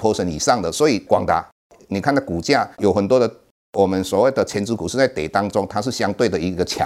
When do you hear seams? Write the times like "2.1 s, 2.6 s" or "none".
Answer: 2.7 s